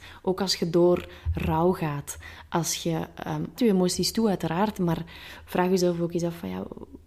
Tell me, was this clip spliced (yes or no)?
yes